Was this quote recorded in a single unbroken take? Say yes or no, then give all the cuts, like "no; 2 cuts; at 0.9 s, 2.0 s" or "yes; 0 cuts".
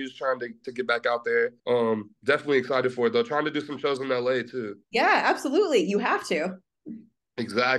no; 2 cuts; at 1.6 s, 4.8 s